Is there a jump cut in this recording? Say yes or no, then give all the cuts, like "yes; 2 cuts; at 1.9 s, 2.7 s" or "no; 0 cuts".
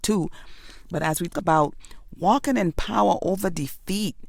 yes; 1 cut; at 1.3 s